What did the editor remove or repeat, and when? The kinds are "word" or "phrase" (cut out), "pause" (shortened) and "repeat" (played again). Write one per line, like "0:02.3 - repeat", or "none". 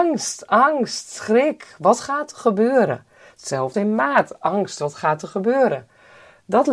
0:03.7 - word